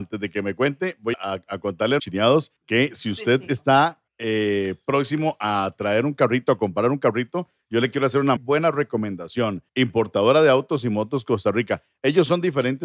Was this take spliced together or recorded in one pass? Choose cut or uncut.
cut